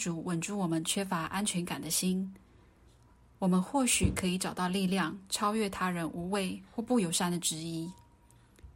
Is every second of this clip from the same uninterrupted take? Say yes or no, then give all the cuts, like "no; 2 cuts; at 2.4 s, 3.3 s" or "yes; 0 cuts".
yes; 0 cuts